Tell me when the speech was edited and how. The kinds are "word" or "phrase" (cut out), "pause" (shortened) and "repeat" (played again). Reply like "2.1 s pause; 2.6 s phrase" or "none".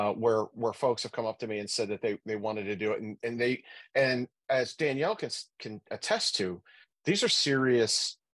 none